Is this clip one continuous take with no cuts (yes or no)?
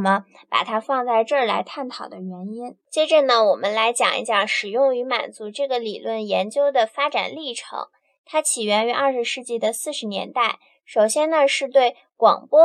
yes